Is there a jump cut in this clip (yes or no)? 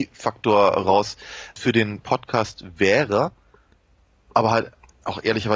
yes